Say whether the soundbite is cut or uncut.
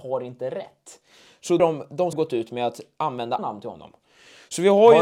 cut